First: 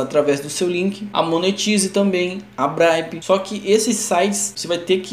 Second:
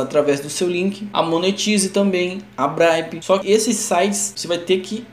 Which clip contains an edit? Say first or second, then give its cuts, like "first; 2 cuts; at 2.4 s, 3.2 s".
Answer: second; 1 cut; at 3.4 s